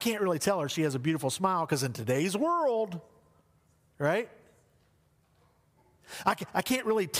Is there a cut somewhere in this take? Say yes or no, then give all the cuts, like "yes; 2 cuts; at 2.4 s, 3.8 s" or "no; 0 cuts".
no; 0 cuts